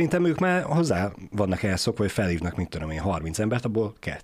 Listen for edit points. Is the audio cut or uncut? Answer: uncut